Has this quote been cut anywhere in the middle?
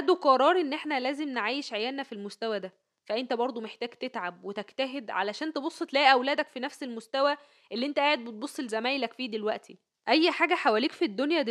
no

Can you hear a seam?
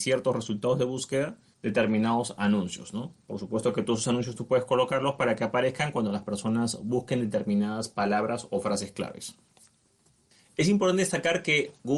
no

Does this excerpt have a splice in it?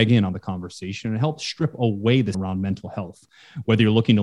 yes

